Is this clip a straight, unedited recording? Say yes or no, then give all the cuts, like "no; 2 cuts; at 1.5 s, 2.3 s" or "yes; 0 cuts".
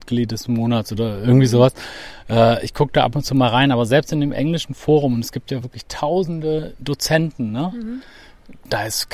yes; 0 cuts